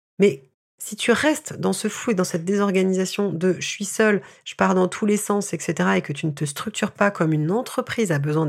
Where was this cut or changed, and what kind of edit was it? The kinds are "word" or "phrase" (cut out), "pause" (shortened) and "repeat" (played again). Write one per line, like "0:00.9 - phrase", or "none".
none